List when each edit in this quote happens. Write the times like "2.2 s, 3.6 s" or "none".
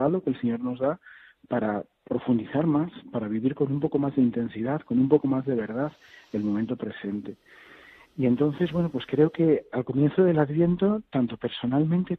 none